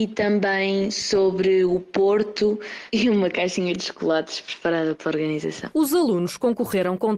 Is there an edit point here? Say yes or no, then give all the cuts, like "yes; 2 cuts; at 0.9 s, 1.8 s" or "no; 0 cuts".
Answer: no; 0 cuts